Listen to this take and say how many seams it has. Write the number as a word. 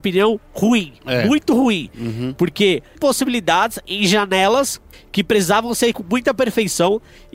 two